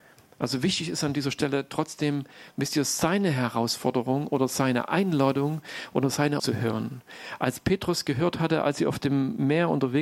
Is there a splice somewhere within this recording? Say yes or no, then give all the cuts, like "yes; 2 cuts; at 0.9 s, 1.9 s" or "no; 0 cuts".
yes; 1 cut; at 6.4 s